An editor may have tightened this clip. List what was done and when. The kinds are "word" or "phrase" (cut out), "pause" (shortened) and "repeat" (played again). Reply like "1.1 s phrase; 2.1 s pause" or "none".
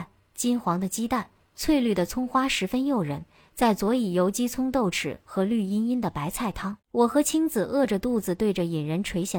6.8 s pause